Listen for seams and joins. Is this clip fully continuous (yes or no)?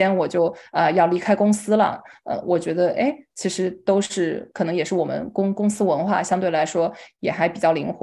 yes